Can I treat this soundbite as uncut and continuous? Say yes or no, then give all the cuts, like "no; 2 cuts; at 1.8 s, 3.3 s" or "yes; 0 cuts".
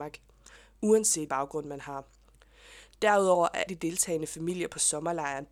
no; 2 cuts; at 1.3 s, 3.7 s